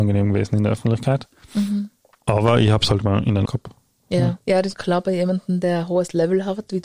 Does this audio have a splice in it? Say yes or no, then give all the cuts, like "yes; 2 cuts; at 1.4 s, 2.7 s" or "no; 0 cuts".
yes; 3 cuts; at 3.4 s, 4.4 s, 4.7 s